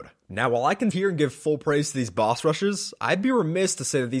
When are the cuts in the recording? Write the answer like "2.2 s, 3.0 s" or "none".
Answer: 0.9 s